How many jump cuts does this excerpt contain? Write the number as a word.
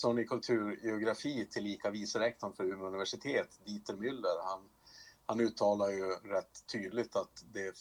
zero